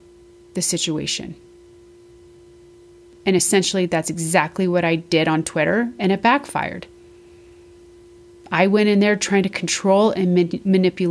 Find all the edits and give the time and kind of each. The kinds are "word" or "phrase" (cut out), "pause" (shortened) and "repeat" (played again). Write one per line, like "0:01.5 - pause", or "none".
none